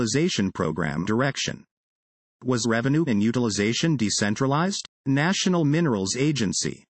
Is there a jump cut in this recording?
yes; 4 cuts; at 1.1 s, 2.6 s, 3.1 s, 4.9 s

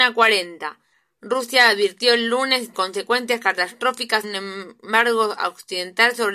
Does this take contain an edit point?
yes; 3 cuts; at 0.9 s, 2.7 s, 4.2 s

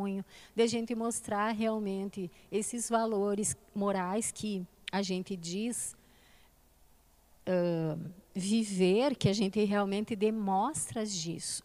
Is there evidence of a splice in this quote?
no; 0 cuts

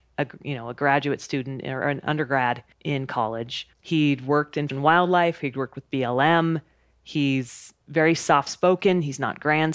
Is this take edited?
yes; 4 cuts; at 2.7 s, 3.7 s, 4.7 s, 7.8 s

